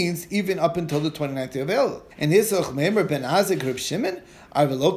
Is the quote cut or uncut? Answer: cut